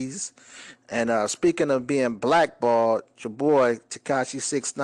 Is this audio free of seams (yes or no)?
yes